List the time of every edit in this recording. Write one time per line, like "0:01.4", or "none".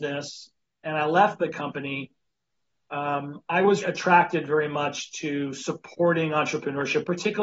0:03.8